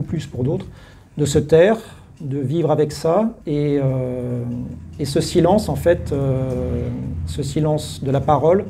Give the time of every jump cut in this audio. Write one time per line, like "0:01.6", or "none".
0:00.9
0:03.4